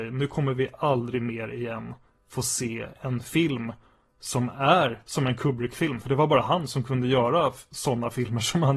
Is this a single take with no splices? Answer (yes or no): yes